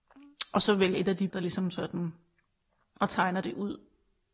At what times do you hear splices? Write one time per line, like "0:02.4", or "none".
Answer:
0:00.9
0:01.3
0:02.8